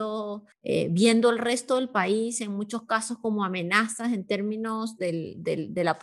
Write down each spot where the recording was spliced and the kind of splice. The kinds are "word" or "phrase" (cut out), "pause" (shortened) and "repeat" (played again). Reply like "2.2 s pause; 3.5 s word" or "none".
none